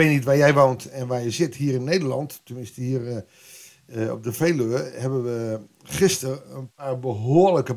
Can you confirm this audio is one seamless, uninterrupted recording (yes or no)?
yes